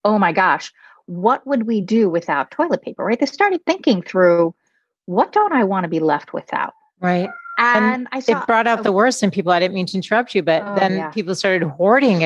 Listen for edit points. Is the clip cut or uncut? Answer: uncut